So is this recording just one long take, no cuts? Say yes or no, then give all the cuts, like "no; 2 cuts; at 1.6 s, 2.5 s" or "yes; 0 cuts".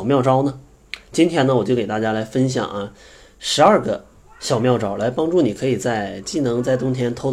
yes; 0 cuts